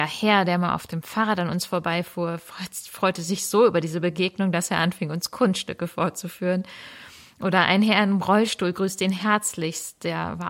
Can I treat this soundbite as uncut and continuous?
yes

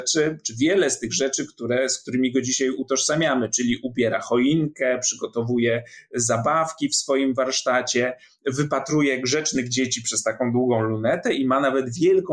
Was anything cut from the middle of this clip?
no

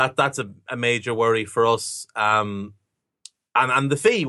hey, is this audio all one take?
yes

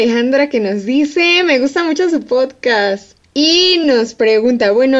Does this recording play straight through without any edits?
yes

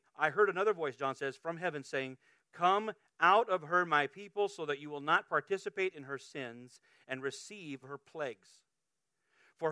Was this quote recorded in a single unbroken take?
no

